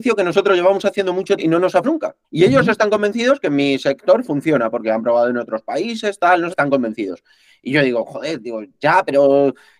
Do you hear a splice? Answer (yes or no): yes